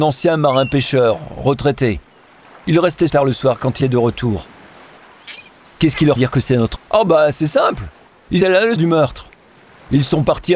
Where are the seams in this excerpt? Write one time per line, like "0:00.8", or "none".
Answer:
0:03.1
0:03.8
0:06.2
0:06.8
0:08.4
0:08.8